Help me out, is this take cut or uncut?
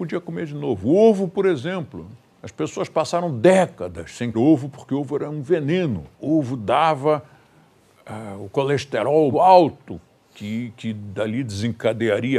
cut